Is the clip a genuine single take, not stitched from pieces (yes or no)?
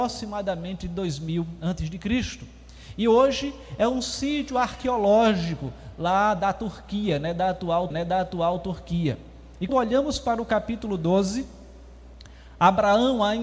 no